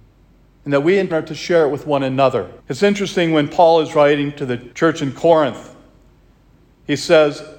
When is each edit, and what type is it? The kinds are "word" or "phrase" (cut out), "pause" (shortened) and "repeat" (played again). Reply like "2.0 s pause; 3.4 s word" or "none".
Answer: 1.1 s word; 2.6 s pause; 4.7 s pause